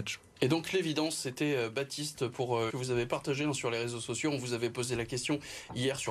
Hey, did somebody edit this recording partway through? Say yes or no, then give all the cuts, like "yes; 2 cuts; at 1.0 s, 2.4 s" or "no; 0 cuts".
yes; 1 cut; at 2.7 s